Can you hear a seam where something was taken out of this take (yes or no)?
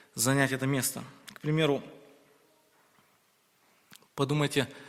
no